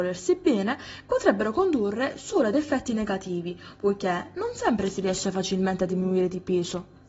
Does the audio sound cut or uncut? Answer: uncut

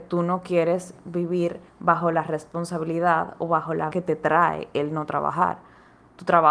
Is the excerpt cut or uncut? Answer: cut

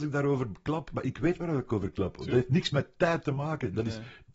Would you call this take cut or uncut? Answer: uncut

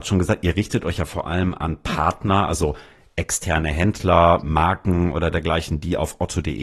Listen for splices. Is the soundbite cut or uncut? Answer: uncut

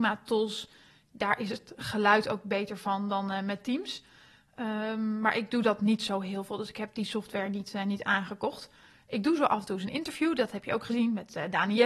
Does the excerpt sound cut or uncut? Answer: uncut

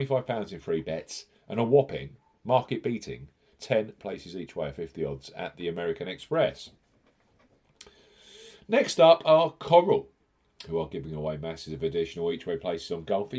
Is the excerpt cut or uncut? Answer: uncut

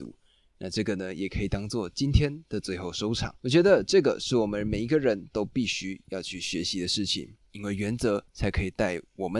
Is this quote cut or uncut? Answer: cut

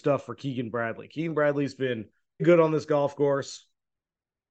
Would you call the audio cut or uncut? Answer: cut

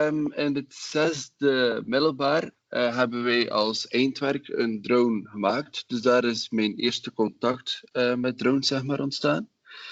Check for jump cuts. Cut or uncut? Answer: uncut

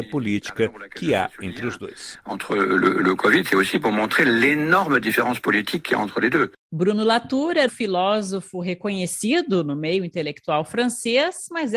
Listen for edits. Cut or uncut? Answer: cut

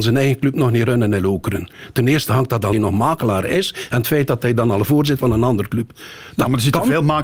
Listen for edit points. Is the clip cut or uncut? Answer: cut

